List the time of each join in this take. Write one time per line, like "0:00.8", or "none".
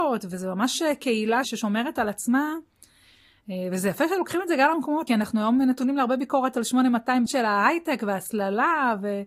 0:01.4
0:05.1
0:07.3